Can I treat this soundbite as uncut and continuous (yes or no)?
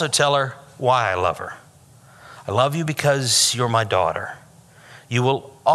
yes